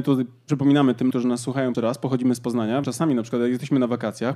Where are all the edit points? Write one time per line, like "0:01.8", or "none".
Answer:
0:01.1
0:01.7
0:02.8